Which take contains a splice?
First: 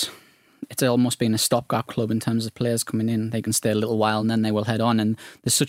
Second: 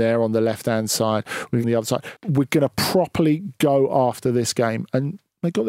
second; 2 cuts; at 1.6 s, 2.2 s

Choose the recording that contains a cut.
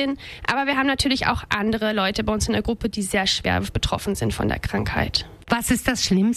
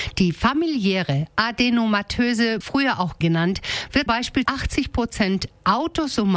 second; 4 cuts; at 2.6 s, 3.2 s, 4.1 s, 4.5 s

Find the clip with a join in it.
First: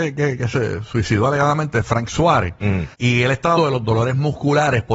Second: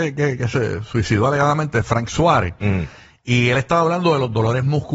first; 2 cuts; at 2.9 s, 3.6 s

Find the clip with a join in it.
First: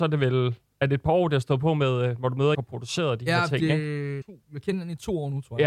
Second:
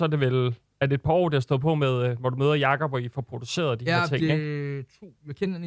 first; 2 cuts; at 2.5 s, 4.2 s

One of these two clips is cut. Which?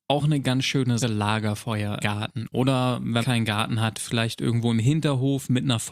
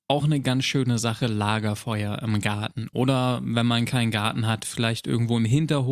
first; 3 cuts; at 1.0 s, 2.0 s, 3.2 s

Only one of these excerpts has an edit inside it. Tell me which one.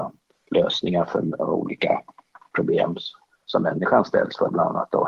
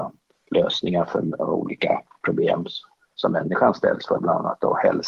second; 1 cut; at 2.1 s

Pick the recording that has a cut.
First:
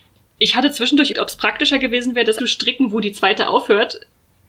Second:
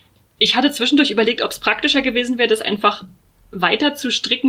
first; 2 cuts; at 1.1 s, 2.4 s

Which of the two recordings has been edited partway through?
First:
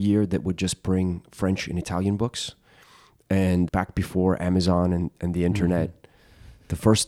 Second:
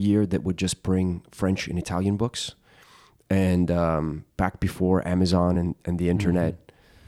first; 1 cut; at 3.7 s

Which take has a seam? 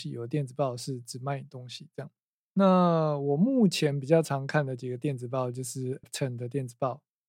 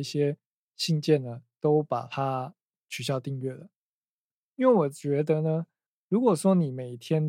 first; 2 cuts; at 2.3 s, 6.0 s

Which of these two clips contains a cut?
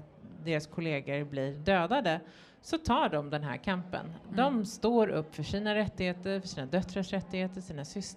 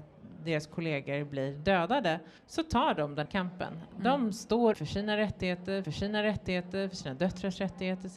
second; 4 cuts; at 2.4 s, 3.3 s, 4.7 s, 5.8 s

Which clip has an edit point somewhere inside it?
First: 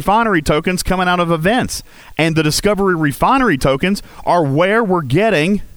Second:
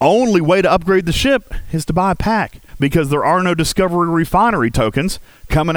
second; 1 cut; at 2.7 s

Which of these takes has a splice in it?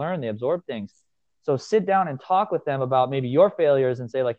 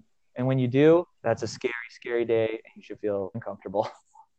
second; 2 cuts; at 1.1 s, 3.3 s

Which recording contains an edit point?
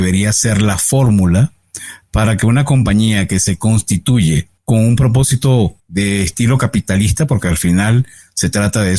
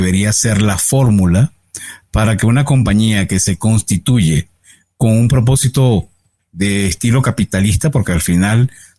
first; 2 cuts; at 4.6 s, 5.8 s

